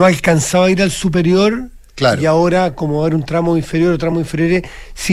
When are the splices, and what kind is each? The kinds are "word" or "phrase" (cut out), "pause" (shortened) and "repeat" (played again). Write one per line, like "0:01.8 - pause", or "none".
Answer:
none